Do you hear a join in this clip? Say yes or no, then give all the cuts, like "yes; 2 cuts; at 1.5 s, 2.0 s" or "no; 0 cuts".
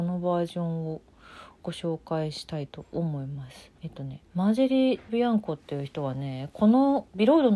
yes; 3 cuts; at 3.8 s, 4.3 s, 5.1 s